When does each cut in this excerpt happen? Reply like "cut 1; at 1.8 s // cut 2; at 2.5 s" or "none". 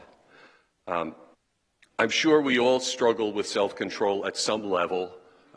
cut 1; at 1.3 s